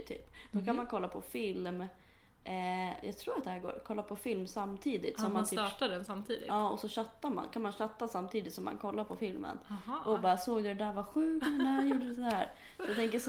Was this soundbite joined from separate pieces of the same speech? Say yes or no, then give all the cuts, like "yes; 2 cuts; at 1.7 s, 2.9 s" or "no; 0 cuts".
no; 0 cuts